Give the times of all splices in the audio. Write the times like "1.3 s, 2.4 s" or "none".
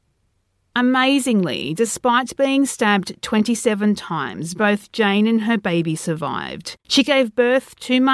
6.8 s